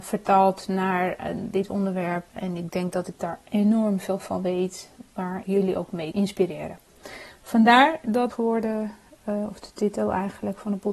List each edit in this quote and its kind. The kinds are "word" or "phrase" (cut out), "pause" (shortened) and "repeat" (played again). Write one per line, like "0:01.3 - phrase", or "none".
0:02.3 - pause
0:05.4 - word
0:06.1 - word
0:08.3 - phrase